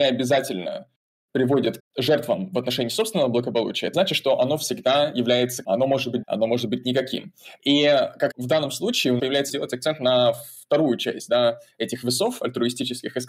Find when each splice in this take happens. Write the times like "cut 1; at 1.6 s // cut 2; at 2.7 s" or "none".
cut 1; at 1.8 s // cut 2; at 3.9 s // cut 3; at 5.6 s // cut 4; at 6.2 s // cut 5; at 8.3 s // cut 6; at 9.2 s // cut 7; at 9.5 s

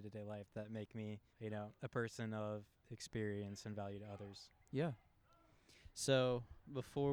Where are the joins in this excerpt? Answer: cut 1; at 1.3 s // cut 2; at 1.8 s

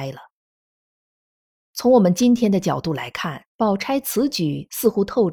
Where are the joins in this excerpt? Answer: cut 1; at 3.5 s

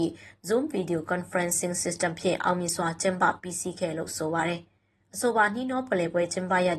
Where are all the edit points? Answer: none

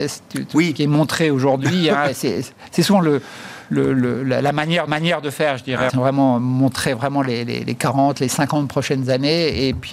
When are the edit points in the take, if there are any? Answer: cut 1; at 4.9 s // cut 2; at 5.9 s

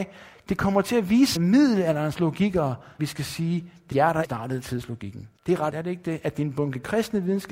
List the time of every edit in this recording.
cut 1; at 1.4 s // cut 2; at 3.0 s // cut 3; at 3.9 s // cut 4; at 4.2 s // cut 5; at 5.4 s // cut 6; at 5.7 s

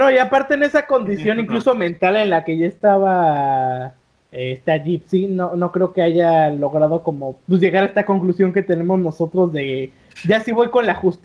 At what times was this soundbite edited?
none

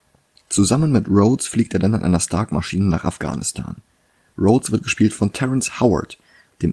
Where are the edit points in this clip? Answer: none

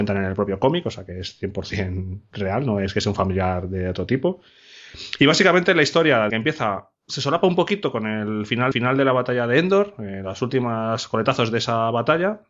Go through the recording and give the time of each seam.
cut 1; at 6.3 s // cut 2; at 6.9 s // cut 3; at 8.7 s

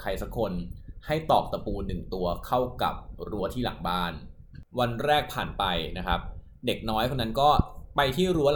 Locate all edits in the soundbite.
cut 1; at 4.7 s

